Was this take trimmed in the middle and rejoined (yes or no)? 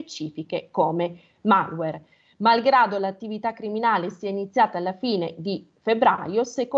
no